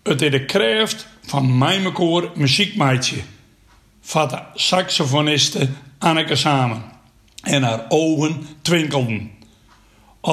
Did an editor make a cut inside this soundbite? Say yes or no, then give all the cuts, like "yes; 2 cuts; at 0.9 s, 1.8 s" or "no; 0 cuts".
no; 0 cuts